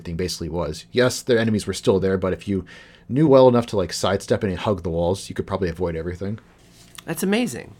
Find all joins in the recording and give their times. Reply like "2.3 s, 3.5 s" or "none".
none